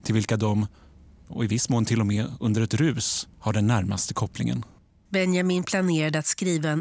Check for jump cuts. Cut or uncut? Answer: cut